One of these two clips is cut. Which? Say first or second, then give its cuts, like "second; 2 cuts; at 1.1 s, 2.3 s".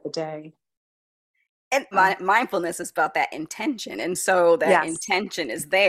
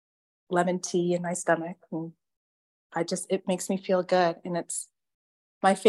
first; 1 cut; at 1.9 s